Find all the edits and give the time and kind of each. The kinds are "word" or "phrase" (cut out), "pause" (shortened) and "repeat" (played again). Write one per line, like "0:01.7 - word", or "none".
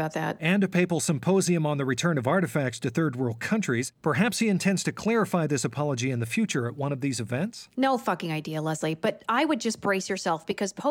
none